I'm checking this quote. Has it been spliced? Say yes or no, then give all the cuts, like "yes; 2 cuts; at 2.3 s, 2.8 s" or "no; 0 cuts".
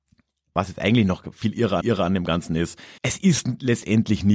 yes; 2 cuts; at 1.8 s, 3.0 s